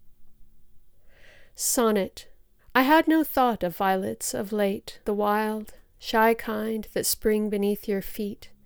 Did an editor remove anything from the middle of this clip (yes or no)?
yes